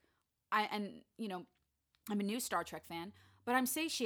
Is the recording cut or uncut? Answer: uncut